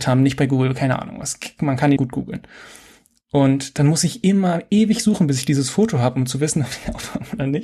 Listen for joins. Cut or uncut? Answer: cut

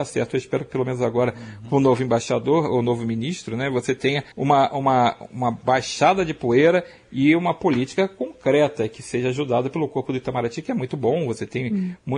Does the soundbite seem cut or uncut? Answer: cut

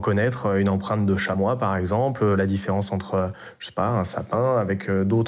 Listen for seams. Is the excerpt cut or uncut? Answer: uncut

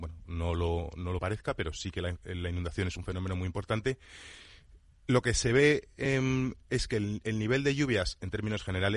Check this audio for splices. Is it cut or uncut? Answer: uncut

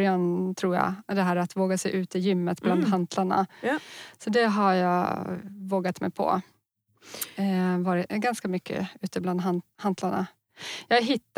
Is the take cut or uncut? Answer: uncut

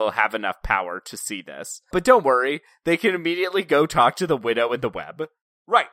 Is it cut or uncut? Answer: uncut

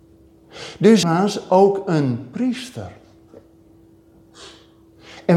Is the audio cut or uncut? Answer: cut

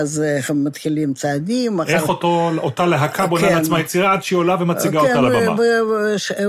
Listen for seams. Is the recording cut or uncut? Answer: uncut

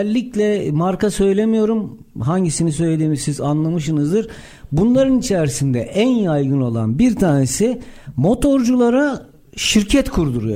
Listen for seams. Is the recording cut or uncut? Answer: uncut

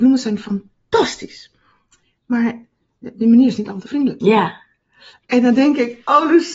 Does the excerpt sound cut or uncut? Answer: cut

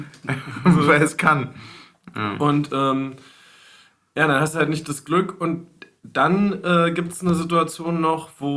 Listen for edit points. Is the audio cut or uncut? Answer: uncut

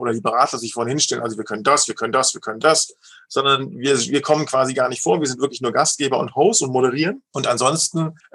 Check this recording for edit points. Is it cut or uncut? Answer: uncut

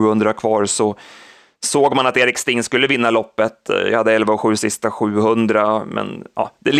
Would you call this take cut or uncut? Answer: uncut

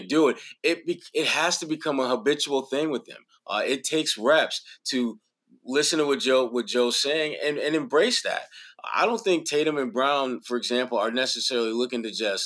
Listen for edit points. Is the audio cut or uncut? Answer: uncut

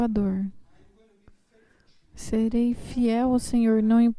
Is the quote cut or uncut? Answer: uncut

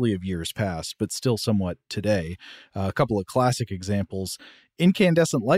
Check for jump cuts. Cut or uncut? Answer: uncut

